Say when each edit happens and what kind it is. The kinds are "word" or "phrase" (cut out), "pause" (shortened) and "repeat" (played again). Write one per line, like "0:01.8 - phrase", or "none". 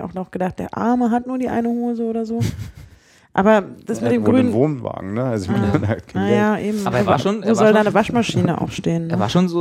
none